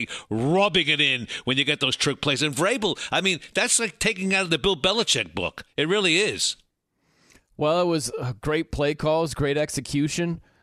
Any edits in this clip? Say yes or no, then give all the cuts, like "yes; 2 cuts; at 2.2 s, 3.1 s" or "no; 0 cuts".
no; 0 cuts